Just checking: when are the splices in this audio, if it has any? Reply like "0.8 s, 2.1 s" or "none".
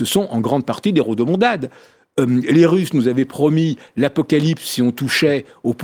none